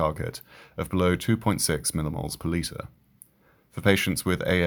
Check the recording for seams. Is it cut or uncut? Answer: uncut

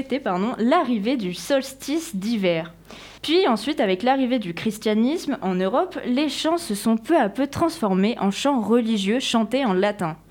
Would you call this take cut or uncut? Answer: cut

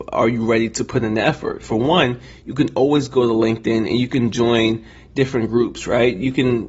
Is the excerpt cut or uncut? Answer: uncut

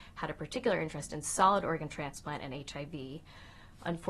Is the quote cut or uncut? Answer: uncut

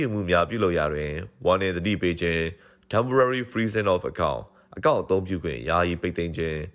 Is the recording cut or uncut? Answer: uncut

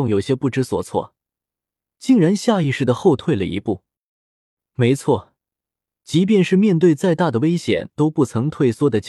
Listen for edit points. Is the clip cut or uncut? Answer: uncut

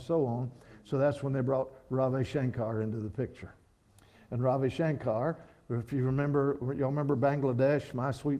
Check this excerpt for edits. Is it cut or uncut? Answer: uncut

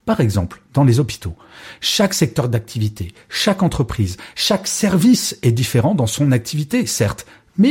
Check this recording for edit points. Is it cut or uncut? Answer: uncut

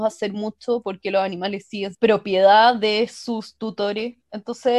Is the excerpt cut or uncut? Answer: cut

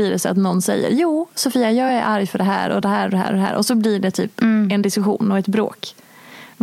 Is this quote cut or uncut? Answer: uncut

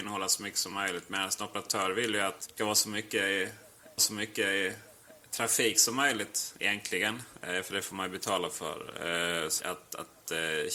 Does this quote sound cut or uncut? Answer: cut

